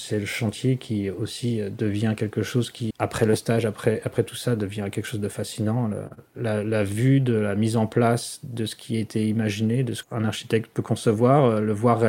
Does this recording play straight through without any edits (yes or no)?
no